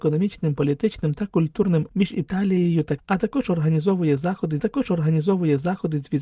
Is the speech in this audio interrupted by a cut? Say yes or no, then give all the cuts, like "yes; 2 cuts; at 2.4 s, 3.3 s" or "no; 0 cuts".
yes; 3 cuts; at 1.9 s, 3.0 s, 4.6 s